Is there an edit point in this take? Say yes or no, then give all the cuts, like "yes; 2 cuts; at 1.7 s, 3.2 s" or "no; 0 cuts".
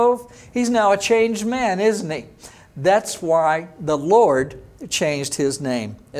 no; 0 cuts